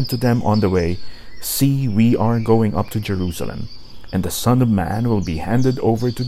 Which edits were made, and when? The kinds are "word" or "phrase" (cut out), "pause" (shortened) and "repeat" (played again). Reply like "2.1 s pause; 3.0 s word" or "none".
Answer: none